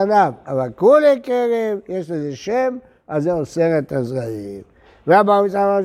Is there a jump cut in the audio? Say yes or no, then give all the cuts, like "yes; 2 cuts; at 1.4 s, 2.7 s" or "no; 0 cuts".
no; 0 cuts